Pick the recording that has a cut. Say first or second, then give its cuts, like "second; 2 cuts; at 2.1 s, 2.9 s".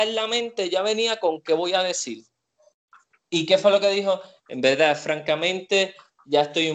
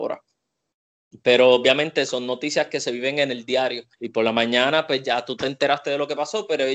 second; 1 cut; at 3.9 s